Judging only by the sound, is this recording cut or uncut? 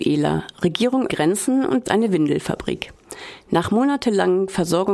cut